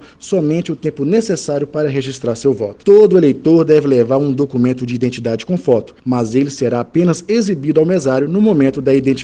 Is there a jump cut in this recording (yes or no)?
no